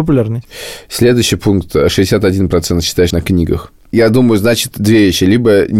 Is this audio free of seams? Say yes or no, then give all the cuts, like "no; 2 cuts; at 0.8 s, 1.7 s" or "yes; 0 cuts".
no; 1 cut; at 3.1 s